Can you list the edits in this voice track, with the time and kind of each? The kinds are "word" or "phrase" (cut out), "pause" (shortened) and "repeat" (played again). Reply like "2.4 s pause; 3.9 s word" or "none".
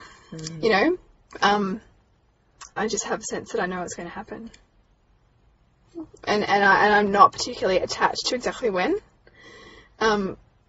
2.7 s pause